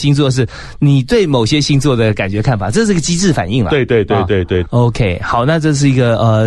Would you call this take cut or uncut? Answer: uncut